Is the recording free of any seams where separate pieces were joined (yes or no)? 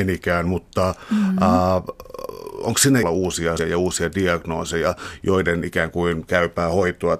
no